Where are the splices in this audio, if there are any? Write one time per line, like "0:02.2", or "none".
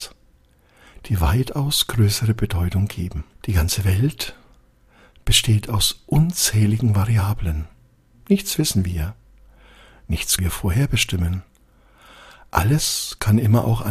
0:03.3
0:10.4

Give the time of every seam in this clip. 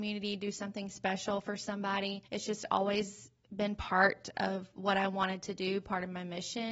none

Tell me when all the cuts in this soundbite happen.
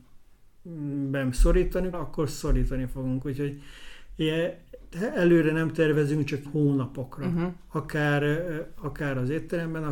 0:01.9
0:06.4

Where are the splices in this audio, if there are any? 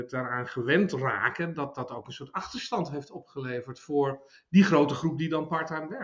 none

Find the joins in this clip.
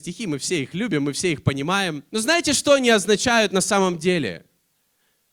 0:02.1

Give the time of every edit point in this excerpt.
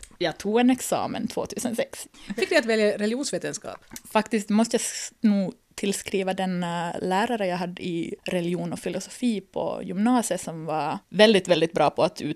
0:02.4
0:04.0
0:11.0

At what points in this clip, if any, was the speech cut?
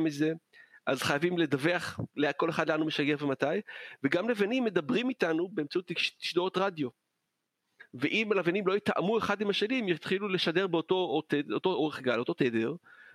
0:02.1

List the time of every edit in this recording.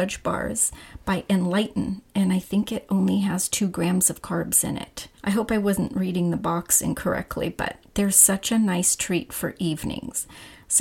0:05.2
0:07.9

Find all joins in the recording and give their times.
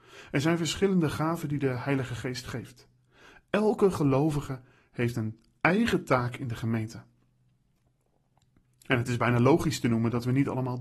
none

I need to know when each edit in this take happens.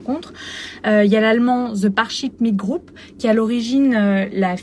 none

